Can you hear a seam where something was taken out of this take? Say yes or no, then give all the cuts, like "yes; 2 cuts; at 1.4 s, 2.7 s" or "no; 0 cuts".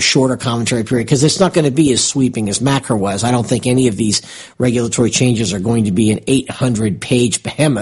no; 0 cuts